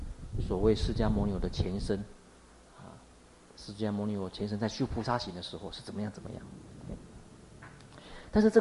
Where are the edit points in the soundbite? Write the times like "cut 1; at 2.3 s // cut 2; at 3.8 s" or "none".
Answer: none